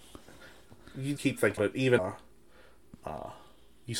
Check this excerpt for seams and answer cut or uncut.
cut